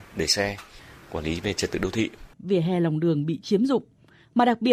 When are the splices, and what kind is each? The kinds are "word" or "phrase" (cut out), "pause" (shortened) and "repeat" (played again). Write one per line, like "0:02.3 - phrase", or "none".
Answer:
0:02.3 - pause